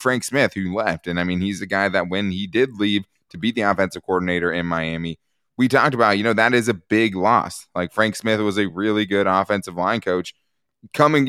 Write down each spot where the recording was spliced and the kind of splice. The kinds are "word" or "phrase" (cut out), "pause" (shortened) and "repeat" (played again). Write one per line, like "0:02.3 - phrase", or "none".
none